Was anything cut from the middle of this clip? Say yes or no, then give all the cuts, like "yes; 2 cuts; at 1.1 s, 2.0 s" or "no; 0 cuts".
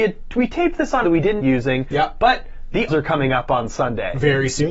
yes; 3 cuts; at 1.0 s, 1.4 s, 2.9 s